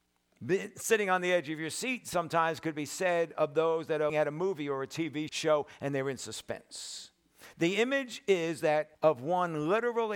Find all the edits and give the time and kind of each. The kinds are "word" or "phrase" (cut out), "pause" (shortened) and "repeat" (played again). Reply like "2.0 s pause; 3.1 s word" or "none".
4.1 s word; 5.3 s word; 8.9 s pause